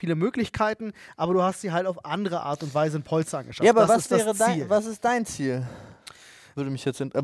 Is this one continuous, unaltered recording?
yes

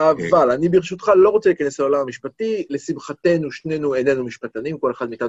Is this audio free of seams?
yes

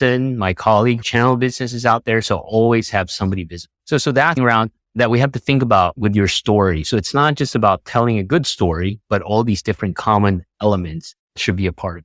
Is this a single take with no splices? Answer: no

